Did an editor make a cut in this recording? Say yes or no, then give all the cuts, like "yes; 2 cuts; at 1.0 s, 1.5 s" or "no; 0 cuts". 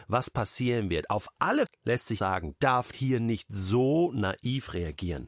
yes; 4 cuts; at 1.7 s, 2.2 s, 2.6 s, 2.9 s